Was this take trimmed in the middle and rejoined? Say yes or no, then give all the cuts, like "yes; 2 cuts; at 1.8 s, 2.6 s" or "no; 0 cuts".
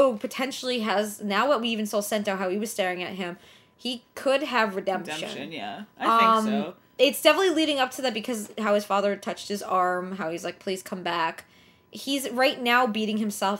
no; 0 cuts